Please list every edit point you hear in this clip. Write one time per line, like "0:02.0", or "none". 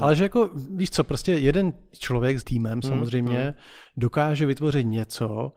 0:02.4